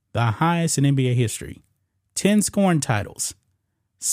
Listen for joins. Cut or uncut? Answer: uncut